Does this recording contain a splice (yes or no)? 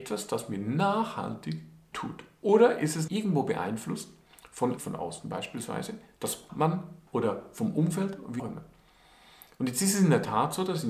yes